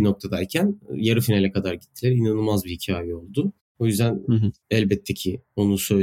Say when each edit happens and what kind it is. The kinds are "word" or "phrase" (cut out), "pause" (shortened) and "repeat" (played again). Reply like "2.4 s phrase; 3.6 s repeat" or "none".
none